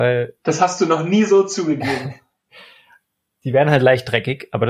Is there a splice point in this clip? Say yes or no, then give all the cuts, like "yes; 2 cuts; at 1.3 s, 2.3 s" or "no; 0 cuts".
no; 0 cuts